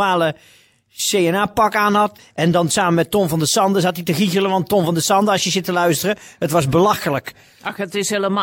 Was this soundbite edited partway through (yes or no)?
no